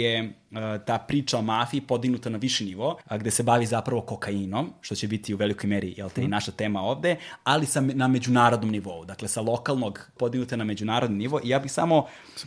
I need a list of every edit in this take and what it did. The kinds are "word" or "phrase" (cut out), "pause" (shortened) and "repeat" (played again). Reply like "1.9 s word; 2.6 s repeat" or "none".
3.0 s pause; 10.2 s word